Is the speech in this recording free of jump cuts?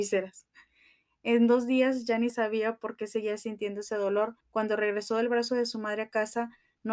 no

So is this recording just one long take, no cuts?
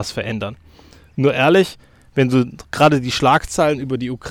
yes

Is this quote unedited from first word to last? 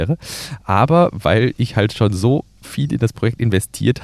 yes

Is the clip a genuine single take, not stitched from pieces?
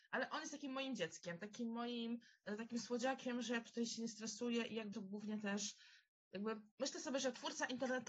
no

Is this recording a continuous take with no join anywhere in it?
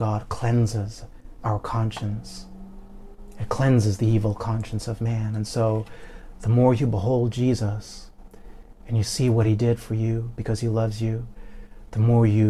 yes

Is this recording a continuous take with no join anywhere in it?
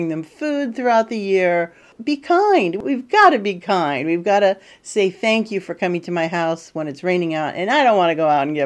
yes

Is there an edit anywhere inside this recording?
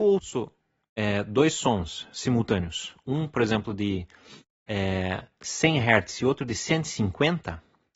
no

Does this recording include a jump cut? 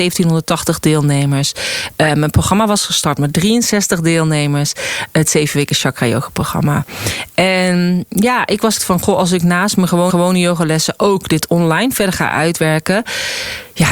yes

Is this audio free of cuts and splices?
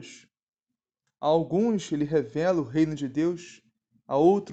yes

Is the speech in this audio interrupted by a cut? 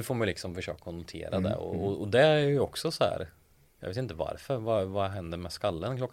no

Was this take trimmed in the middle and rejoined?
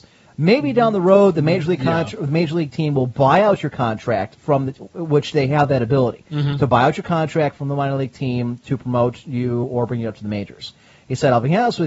no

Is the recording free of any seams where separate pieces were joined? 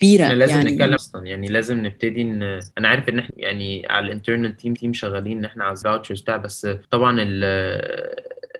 no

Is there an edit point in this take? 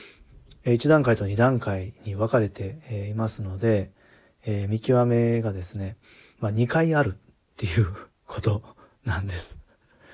no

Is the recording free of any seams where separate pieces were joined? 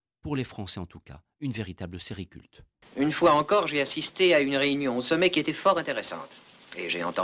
yes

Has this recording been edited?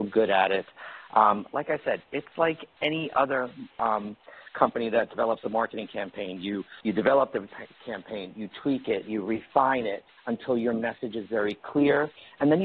yes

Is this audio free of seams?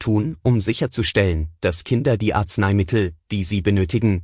yes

